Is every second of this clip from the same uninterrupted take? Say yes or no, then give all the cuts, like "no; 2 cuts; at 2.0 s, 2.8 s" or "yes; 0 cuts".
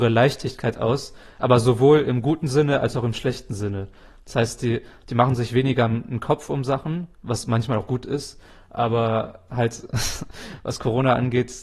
yes; 0 cuts